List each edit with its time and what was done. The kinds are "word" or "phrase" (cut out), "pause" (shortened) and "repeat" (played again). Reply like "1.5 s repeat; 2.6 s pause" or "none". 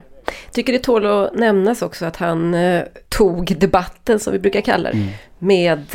3.0 s pause; 4.9 s word